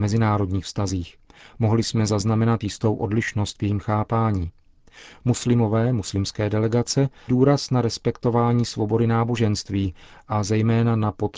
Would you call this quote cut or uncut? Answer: cut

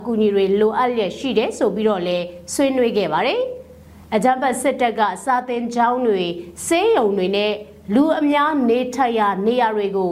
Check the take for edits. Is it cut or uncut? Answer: uncut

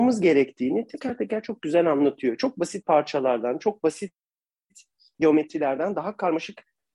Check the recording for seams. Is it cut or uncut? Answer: uncut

